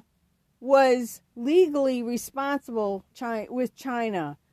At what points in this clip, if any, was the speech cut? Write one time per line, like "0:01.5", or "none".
0:03.1